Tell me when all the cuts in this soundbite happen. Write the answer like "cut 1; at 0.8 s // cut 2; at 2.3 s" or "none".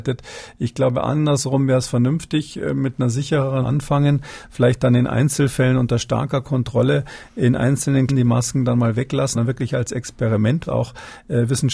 cut 1; at 3.6 s // cut 2; at 8.1 s // cut 3; at 9.3 s // cut 4; at 10.7 s